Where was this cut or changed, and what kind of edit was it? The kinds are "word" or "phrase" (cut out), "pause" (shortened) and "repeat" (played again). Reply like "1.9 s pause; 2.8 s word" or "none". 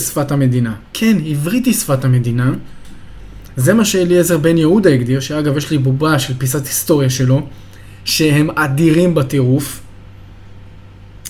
none